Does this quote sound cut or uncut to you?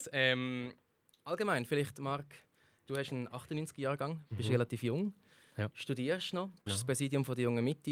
cut